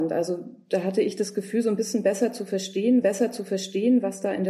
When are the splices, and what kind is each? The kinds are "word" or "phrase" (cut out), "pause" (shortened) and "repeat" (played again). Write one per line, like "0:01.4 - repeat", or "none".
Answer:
0:03.0 - repeat